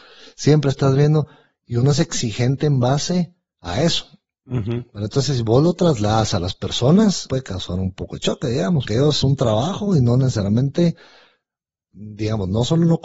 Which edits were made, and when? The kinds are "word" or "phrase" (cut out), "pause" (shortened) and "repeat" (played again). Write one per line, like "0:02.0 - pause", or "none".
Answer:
0:07.3 - word
0:08.9 - word
0:09.2 - word